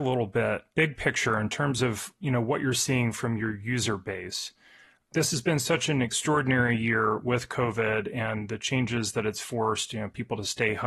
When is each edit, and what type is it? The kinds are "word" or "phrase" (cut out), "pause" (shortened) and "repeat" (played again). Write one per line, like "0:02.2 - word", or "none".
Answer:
none